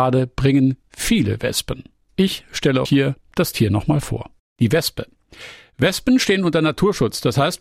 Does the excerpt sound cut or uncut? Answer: cut